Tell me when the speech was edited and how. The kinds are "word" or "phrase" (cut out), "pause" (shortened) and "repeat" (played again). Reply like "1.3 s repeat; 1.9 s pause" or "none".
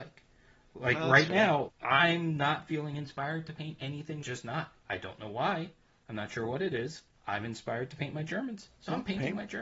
1.7 s word; 4.2 s phrase; 7.1 s pause

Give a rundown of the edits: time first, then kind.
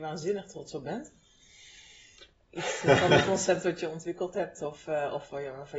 none

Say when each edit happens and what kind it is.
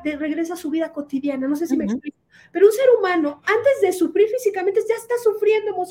none

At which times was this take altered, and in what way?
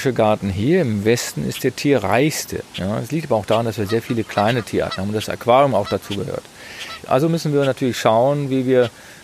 none

